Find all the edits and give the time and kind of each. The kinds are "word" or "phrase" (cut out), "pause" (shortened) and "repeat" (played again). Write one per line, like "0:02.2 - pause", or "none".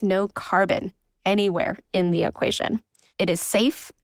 none